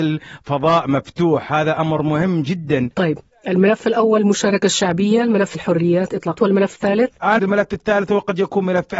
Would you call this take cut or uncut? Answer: cut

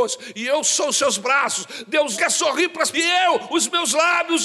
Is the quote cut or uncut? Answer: cut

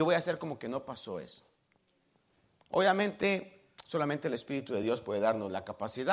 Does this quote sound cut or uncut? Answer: uncut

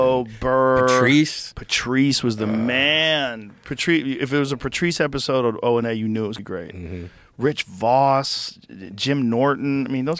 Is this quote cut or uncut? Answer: cut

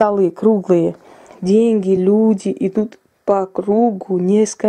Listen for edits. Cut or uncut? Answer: uncut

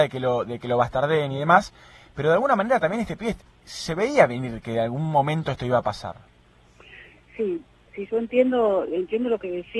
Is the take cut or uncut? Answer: uncut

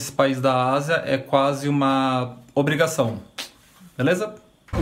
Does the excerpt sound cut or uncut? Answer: uncut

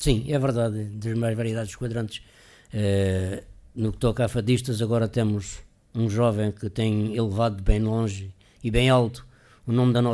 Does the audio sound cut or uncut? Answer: uncut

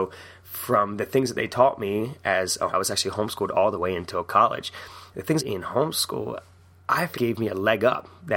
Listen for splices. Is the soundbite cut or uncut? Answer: cut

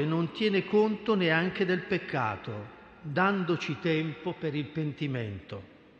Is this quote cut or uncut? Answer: uncut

